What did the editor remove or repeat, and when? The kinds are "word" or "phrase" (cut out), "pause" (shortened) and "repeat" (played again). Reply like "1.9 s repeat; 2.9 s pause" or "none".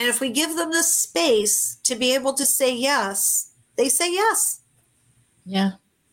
none